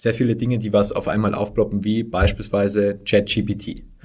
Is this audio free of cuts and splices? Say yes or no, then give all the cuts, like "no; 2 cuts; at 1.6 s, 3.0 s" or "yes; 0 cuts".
yes; 0 cuts